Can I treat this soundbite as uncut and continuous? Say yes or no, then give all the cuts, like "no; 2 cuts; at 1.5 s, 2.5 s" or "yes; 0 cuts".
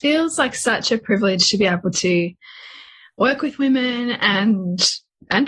yes; 0 cuts